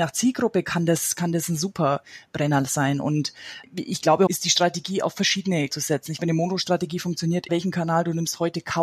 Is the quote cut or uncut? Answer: cut